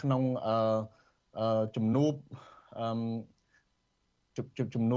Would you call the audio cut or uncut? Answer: uncut